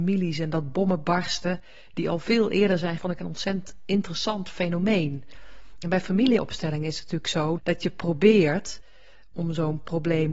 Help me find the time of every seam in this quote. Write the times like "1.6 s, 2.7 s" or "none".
3.0 s, 7.6 s

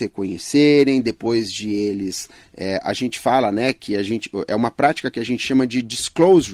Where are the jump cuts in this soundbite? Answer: none

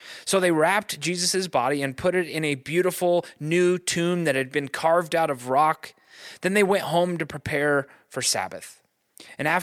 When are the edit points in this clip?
none

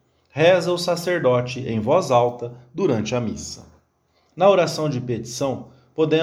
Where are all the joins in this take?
none

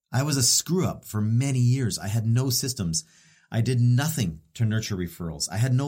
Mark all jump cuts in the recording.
none

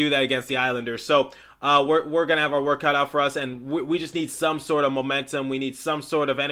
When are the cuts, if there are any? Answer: none

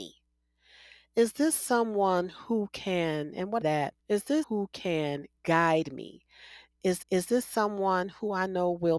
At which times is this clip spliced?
3.6 s, 4.0 s, 4.4 s, 7.0 s

